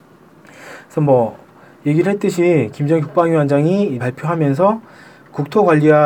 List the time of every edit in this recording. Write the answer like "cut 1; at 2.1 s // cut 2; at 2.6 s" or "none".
cut 1; at 4.0 s